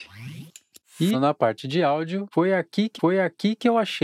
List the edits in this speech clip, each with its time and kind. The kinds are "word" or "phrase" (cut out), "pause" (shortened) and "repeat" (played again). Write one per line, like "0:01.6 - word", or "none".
0:01.1 - word
0:03.0 - repeat